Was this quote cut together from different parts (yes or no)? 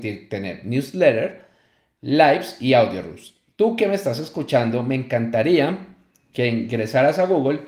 no